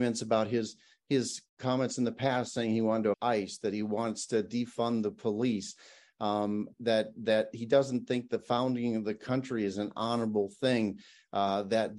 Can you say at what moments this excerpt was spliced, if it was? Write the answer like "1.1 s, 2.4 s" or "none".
1.5 s, 3.1 s, 6.7 s